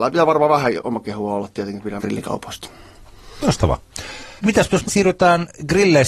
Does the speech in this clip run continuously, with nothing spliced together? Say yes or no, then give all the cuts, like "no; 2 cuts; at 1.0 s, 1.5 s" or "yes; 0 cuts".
no; 4 cuts; at 1.0 s, 2.0 s, 4.4 s, 4.8 s